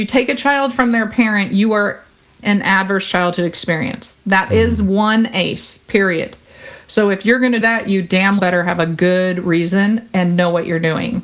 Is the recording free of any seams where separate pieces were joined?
no; 3 cuts; at 2.4 s, 7.6 s, 8.4 s

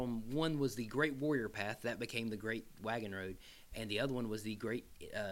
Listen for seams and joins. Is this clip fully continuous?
yes; 0 cuts

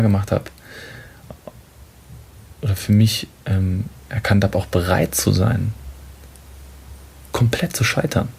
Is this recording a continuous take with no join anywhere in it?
no; 1 cut; at 2.6 s

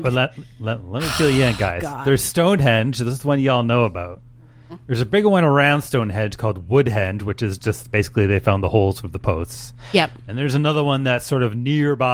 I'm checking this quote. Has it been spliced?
no; 0 cuts

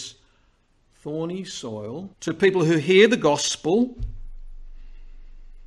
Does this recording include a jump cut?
yes; 1 cut; at 2.1 s

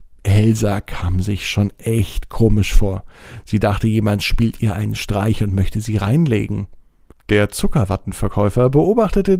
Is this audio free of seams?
yes; 0 cuts

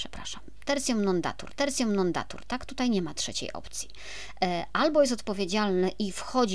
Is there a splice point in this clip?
yes; 1 cut; at 1.5 s

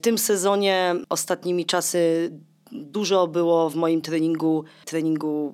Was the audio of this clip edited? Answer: no; 0 cuts

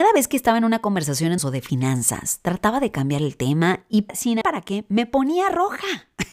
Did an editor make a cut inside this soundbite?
yes; 2 cuts; at 1.4 s, 4.4 s

